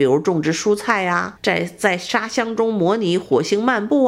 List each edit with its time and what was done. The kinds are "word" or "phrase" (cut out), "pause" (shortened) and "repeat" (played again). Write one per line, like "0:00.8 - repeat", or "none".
0:01.4 - word

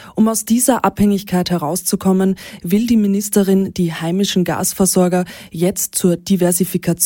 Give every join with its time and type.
none

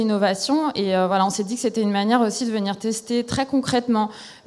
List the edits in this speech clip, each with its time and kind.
none

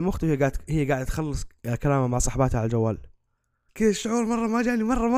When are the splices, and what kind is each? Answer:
none

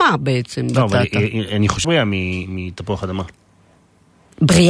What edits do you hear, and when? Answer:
0:01.8 - word

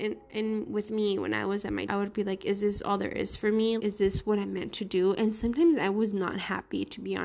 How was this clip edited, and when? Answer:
0:01.9 - word
0:03.8 - word

